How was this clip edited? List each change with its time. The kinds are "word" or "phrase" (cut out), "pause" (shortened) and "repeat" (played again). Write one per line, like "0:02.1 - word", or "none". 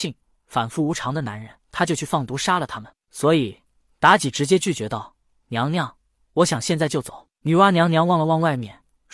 0:01.6 - pause